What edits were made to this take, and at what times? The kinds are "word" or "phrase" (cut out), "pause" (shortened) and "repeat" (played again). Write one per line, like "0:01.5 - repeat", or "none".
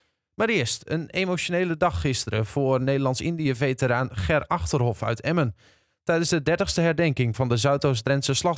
none